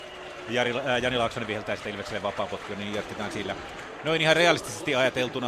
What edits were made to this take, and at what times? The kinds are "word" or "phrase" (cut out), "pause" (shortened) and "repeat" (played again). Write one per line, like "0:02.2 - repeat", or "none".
none